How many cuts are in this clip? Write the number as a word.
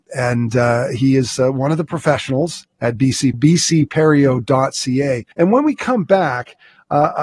two